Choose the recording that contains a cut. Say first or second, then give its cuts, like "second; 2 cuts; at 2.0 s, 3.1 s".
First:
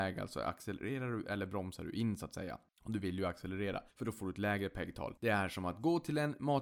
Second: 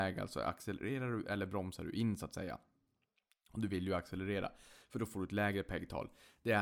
first; 3 cuts; at 2.7 s, 3.9 s, 5.2 s